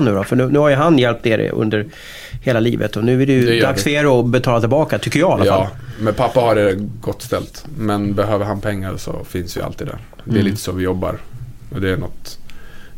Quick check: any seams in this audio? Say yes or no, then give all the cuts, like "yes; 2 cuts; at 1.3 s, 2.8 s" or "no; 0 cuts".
no; 0 cuts